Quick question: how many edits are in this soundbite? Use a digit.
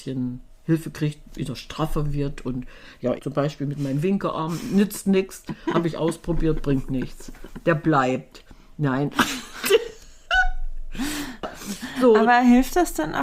1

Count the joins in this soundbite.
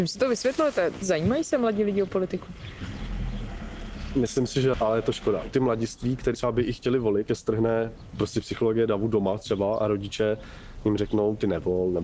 3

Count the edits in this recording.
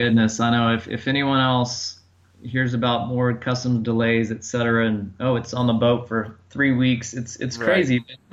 0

